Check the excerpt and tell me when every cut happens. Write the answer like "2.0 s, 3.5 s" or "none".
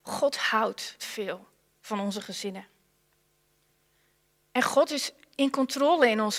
1.0 s